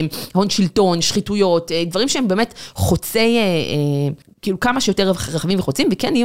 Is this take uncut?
no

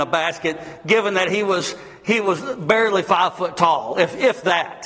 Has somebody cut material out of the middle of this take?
no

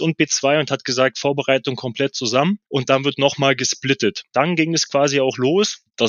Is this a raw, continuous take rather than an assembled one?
yes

